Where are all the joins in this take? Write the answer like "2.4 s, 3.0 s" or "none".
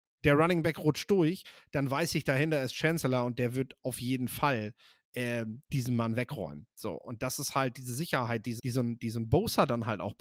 5.6 s, 8.6 s